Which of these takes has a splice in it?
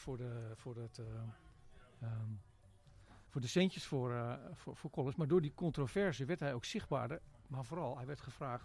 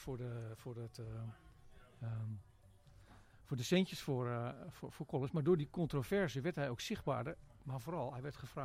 first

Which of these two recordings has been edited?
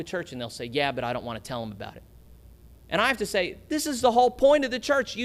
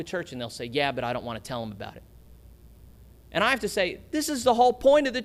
first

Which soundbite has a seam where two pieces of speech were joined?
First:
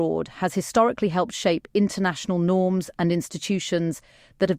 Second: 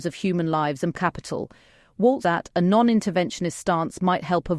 second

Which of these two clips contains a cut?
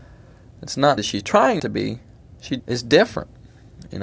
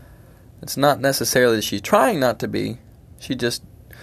first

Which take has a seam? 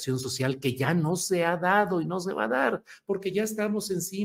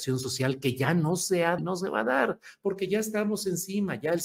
second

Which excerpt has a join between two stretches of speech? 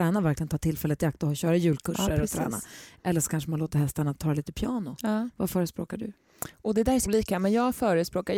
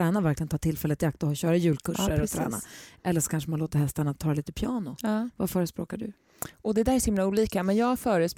first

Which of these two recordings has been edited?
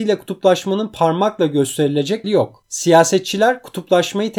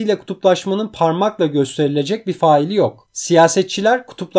first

